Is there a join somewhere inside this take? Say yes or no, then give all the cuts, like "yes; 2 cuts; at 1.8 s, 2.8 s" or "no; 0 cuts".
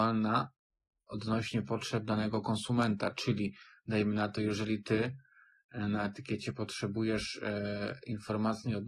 no; 0 cuts